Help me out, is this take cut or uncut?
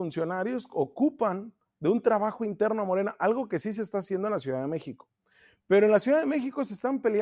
uncut